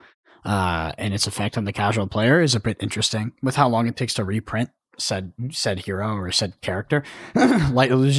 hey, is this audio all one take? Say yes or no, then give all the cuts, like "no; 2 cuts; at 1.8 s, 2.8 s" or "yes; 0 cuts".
yes; 0 cuts